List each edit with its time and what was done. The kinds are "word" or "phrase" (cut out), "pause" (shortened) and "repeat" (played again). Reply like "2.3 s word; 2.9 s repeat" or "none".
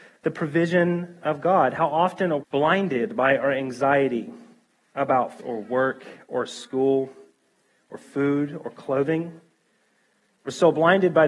2.4 s word; 5.4 s word

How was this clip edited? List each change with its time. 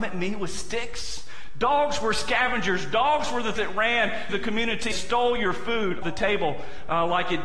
3.6 s word; 4.3 s word; 4.9 s word; 6.0 s word

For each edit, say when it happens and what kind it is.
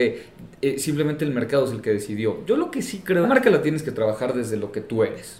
3.2 s phrase

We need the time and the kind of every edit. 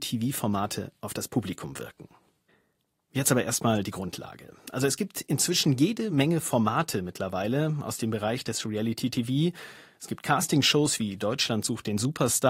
none

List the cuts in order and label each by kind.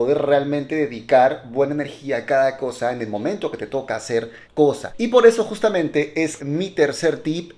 4.4 s word; 6.4 s word

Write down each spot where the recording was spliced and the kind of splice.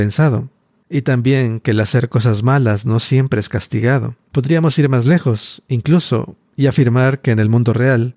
4.2 s pause

